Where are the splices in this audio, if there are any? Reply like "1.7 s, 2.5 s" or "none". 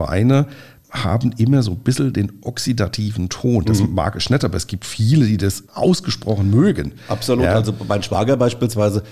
5.7 s

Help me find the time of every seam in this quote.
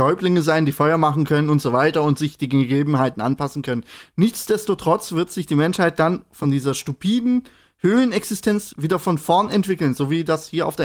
none

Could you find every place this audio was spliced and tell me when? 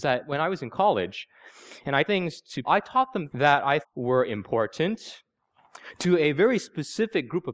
2.1 s, 2.6 s, 3.3 s, 3.8 s

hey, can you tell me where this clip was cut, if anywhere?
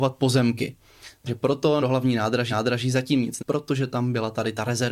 1.3 s, 1.8 s, 2.5 s, 3.4 s

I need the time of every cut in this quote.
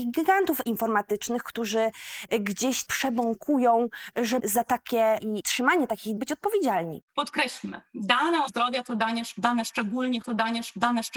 2.8 s, 4.4 s, 5.2 s, 6.2 s, 7.1 s, 8.5 s, 10.2 s

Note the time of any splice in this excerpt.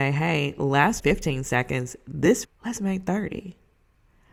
1.0 s, 2.4 s

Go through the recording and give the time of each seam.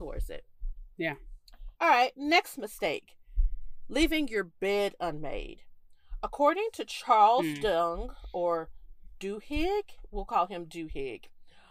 1.7 s

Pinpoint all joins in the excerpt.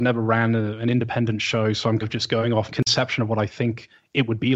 2.0 s, 2.7 s

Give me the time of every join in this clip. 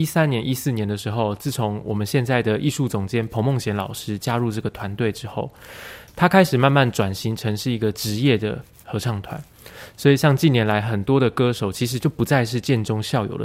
none

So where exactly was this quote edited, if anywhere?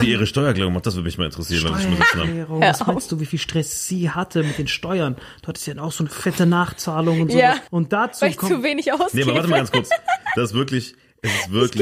7.7 s

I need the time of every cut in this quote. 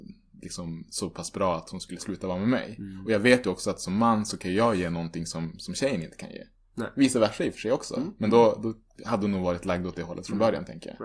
none

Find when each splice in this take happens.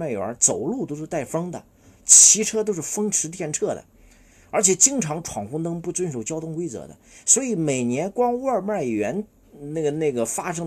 none

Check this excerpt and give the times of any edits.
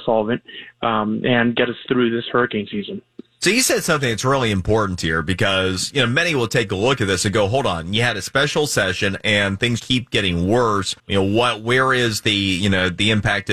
9.8 s, 11.0 s

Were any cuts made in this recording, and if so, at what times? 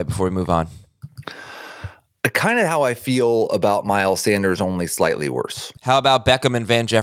5.8 s

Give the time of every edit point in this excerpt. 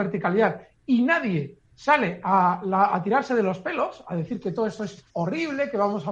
1.7 s, 5.1 s

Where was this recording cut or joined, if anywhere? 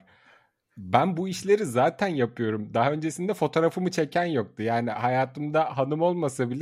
none

